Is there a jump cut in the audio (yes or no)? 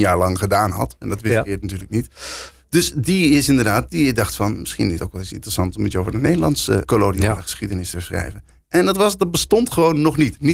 yes